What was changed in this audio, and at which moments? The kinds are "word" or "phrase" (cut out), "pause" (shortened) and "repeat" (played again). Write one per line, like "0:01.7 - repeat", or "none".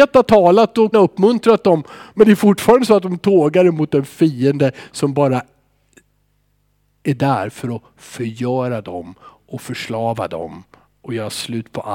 0:00.9 - word